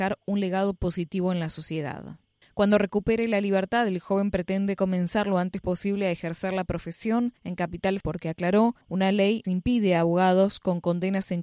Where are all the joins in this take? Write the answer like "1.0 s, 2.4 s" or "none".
2.4 s, 7.4 s, 8.0 s, 8.8 s, 9.4 s